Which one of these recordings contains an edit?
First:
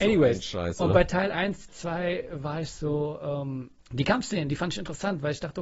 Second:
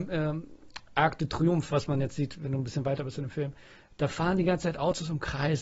first; 1 cut; at 3.8 s

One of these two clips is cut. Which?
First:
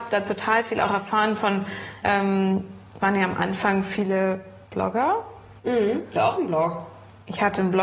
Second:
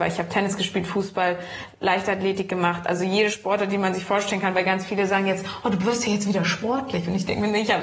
first; 4 cuts; at 2.0 s, 3.0 s, 5.6 s, 6.1 s

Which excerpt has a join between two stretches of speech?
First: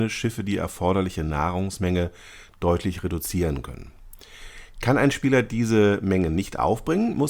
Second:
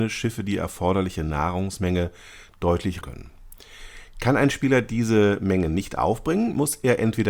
second; 1 cut; at 3.0 s

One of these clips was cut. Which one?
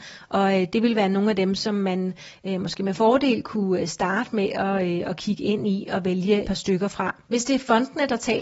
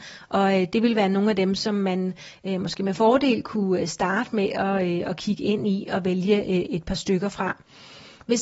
first; 2 cuts; at 6.4 s, 7.2 s

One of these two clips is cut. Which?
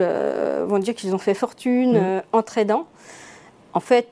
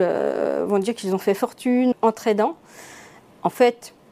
second; 1 cut; at 1.9 s

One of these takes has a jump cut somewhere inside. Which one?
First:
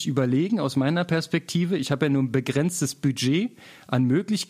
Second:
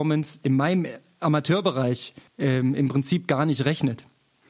second; 1 cut; at 2.3 s

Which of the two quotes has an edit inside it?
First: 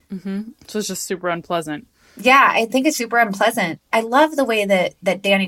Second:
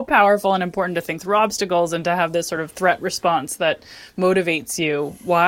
first; 1 cut; at 3.0 s

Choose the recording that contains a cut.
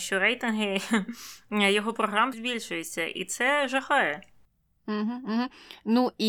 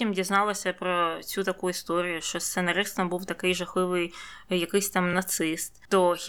first; 1 cut; at 2.3 s

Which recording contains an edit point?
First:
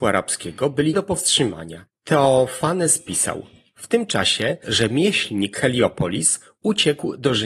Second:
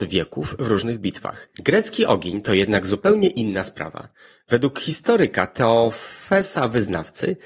first; 3 cuts; at 0.9 s, 4.6 s, 5.5 s

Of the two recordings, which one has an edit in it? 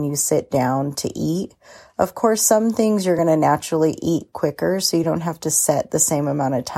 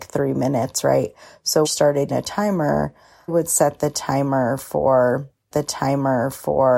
second; 4 cuts; at 1.6 s, 2.1 s, 3.3 s, 5.5 s

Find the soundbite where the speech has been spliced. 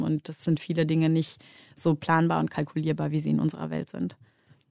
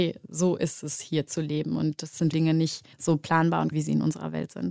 second; 3 cuts; at 2.3 s, 2.9 s, 3.7 s

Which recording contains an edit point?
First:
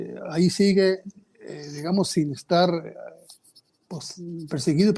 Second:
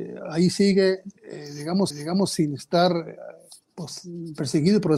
second; 3 cuts; at 1.2 s, 1.9 s, 3.6 s

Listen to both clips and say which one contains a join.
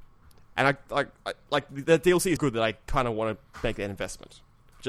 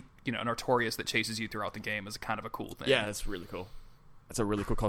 first; 1 cut; at 2.4 s

